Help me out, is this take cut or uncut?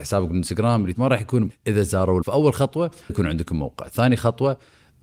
cut